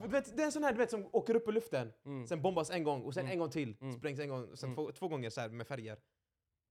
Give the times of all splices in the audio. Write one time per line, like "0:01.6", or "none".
none